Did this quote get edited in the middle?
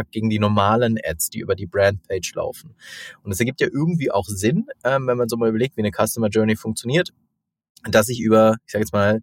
no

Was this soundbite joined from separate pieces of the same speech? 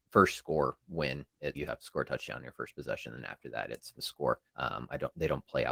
yes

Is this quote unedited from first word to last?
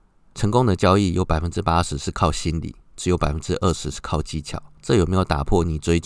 yes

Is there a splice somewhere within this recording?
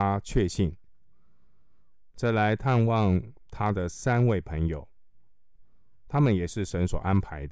no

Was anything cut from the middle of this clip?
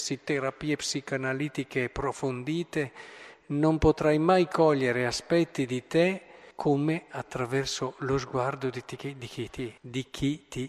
yes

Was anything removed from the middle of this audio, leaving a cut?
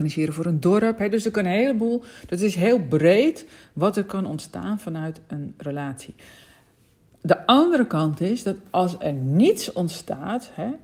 no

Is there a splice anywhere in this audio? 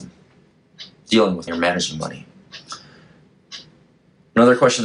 yes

